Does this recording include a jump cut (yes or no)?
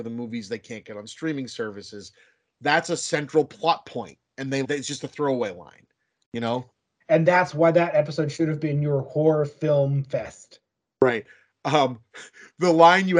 yes